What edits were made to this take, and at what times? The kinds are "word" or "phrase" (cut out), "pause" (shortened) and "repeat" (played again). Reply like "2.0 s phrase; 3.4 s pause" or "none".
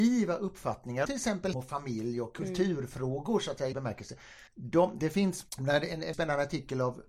1.1 s word; 1.5 s word; 3.7 s word; 4.5 s pause; 5.5 s pause; 6.1 s word